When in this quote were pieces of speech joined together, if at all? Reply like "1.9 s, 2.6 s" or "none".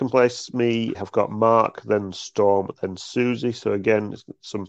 0.9 s